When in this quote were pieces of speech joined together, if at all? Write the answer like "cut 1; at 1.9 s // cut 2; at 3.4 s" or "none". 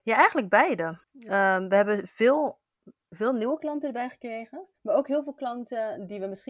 cut 1; at 1.0 s // cut 2; at 4.8 s